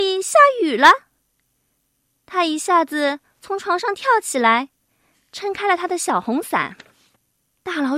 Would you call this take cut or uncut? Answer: uncut